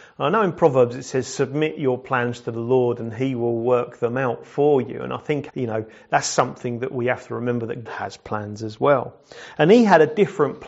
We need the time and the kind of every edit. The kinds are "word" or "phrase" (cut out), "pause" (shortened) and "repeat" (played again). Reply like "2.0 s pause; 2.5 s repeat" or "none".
5.5 s word; 7.9 s word